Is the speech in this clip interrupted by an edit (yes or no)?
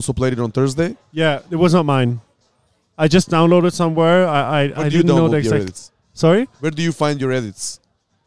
no